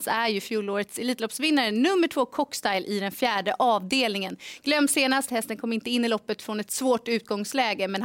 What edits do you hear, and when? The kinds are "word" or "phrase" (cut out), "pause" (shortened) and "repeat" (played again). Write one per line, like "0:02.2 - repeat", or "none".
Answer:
none